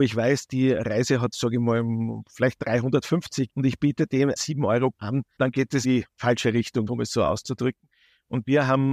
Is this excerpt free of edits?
no; 7 cuts; at 1.3 s, 3.5 s, 4.4 s, 4.9 s, 5.4 s, 5.8 s, 6.9 s

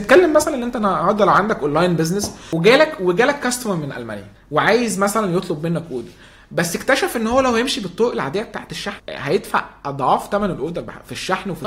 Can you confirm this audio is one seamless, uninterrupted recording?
yes; 0 cuts

